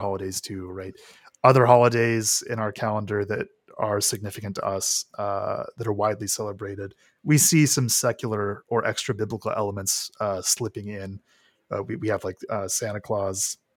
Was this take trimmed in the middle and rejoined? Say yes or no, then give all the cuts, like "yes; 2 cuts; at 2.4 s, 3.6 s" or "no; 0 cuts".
no; 0 cuts